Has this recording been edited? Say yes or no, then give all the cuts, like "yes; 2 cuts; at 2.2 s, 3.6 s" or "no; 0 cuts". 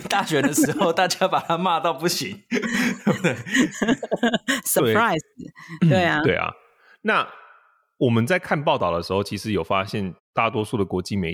no; 0 cuts